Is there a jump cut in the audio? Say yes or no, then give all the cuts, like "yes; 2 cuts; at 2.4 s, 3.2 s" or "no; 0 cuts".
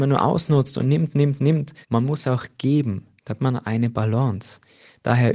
yes; 2 cuts; at 1.8 s, 3.4 s